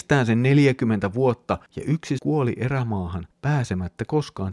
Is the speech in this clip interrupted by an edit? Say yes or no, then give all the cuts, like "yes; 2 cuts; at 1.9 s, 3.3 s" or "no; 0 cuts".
yes; 3 cuts; at 1.7 s, 2.2 s, 3.3 s